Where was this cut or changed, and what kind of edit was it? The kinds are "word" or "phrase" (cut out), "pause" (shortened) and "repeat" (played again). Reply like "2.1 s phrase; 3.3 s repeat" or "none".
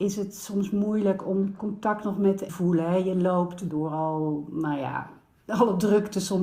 1.6 s word; 2.5 s phrase; 3.7 s phrase